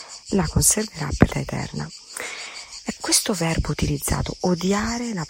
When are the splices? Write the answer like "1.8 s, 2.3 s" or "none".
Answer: 1.3 s, 3.0 s